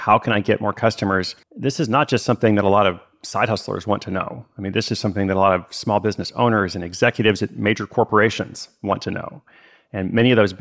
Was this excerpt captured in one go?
no; 1 cut; at 1.4 s

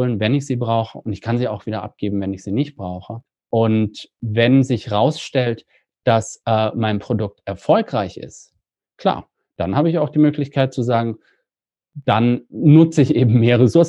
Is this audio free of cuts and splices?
yes; 0 cuts

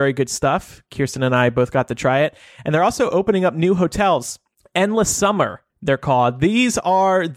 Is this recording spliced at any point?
yes; 2 cuts; at 4.5 s, 5.7 s

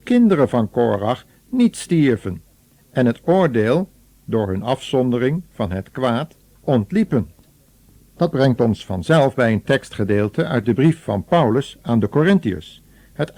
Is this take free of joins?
yes; 0 cuts

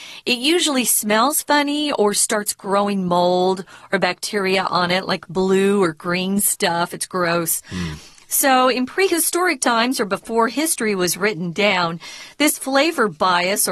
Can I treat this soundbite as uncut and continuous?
yes; 0 cuts

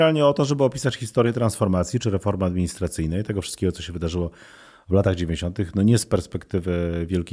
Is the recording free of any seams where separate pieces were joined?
yes; 0 cuts

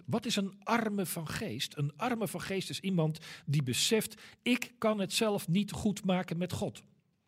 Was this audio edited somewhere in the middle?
no; 0 cuts

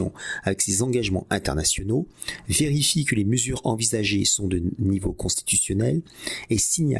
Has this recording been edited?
no; 0 cuts

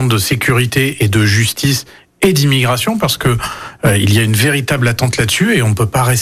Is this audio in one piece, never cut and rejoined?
yes; 0 cuts

